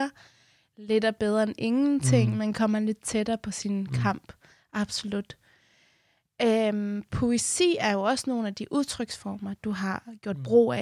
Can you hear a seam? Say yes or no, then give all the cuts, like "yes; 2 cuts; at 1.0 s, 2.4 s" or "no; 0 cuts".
no; 0 cuts